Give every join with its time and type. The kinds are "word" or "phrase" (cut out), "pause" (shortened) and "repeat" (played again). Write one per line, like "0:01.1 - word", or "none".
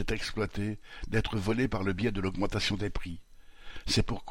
none